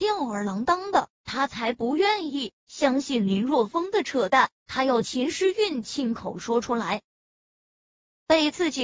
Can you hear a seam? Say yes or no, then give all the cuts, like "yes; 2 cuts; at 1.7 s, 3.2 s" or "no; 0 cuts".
no; 0 cuts